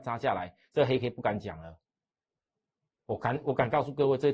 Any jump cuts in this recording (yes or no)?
no